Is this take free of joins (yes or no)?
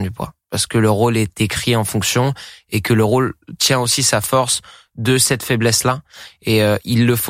yes